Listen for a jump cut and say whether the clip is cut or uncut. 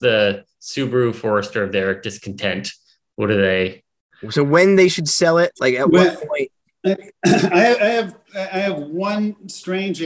uncut